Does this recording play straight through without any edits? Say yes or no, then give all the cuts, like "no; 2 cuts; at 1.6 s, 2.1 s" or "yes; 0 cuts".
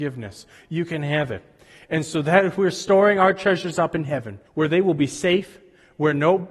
no; 1 cut; at 4.5 s